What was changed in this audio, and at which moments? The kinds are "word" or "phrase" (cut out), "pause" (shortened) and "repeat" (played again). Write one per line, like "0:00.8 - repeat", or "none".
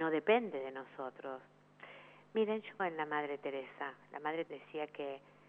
0:02.8 - word
0:04.5 - word